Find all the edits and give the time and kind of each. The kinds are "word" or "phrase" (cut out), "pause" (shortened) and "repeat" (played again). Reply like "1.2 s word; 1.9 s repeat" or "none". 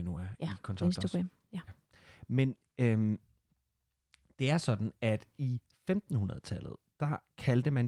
none

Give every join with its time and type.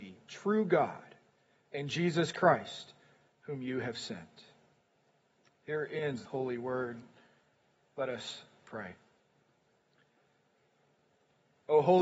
6.3 s phrase

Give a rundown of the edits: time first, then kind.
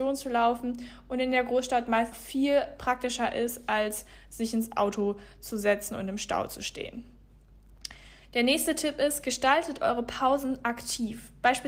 2.1 s word

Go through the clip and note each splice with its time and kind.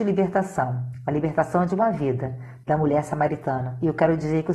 none

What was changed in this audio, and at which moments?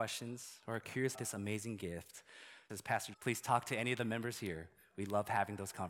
1.1 s word; 2.7 s word; 3.1 s phrase

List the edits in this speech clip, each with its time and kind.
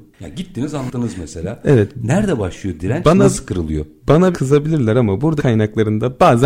4.3 s word; 5.4 s word

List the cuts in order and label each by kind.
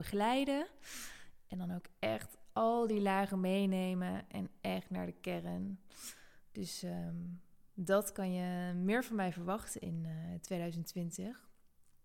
none

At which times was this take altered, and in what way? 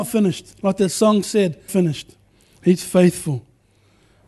1.7 s phrase

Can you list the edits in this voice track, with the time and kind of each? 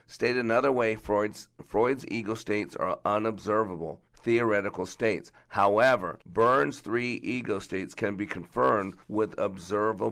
4.1 s pause; 6.2 s pause; 9.0 s pause

